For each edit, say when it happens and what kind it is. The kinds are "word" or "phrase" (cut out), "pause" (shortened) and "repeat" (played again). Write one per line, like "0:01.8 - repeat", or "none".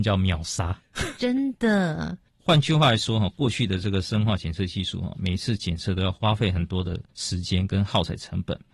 0:07.1 - pause